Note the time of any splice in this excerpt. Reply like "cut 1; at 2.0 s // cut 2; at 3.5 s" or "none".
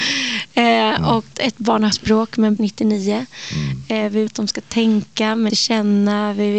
cut 1; at 1.3 s // cut 2; at 1.9 s // cut 3; at 2.6 s // cut 4; at 4.3 s // cut 5; at 5.5 s

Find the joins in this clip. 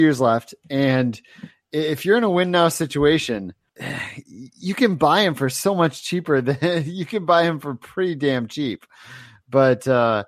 none

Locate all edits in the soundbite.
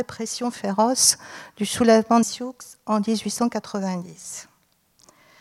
cut 1; at 2.2 s

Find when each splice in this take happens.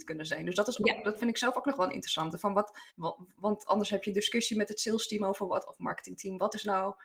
cut 1; at 2.9 s

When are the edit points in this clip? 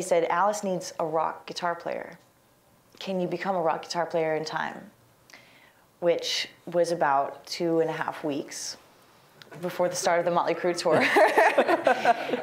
none

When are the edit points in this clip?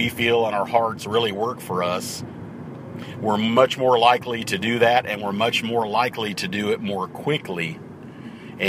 none

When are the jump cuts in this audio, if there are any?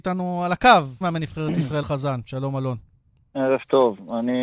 cut 1; at 1.0 s // cut 2; at 1.8 s

